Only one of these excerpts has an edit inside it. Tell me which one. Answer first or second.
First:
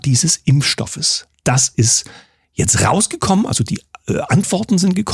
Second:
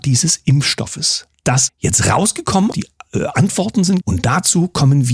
second